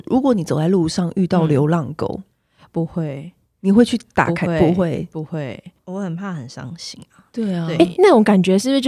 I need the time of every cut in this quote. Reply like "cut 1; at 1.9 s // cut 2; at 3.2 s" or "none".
none